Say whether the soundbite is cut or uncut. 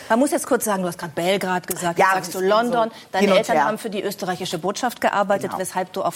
uncut